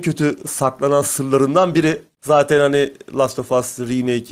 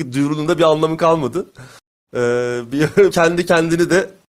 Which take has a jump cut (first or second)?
second